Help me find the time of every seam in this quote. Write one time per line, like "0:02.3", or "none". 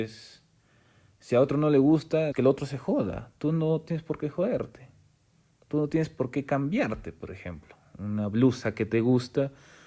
0:02.3